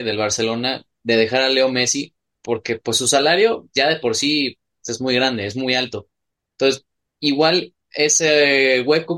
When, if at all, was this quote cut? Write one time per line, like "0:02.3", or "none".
none